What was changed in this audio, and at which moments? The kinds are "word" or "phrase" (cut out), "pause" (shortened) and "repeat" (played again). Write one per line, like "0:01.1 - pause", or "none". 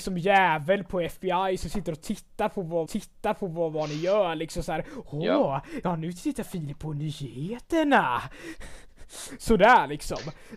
0:02.9 - repeat